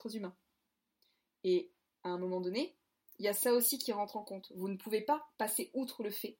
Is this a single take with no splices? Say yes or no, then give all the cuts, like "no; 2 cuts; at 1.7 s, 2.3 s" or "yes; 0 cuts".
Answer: no; 1 cut; at 5.3 s